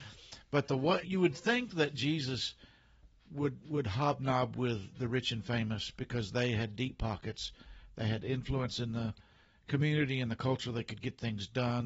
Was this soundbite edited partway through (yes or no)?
yes